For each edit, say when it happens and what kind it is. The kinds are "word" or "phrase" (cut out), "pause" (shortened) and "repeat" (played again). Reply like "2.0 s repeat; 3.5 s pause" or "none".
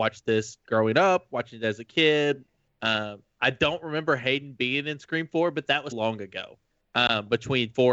5.9 s word